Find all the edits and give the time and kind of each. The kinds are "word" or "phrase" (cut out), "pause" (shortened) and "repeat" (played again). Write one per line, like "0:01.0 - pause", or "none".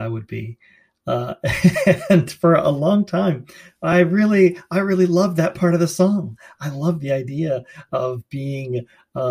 none

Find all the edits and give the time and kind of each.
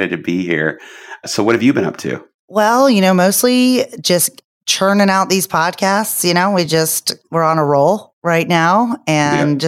none

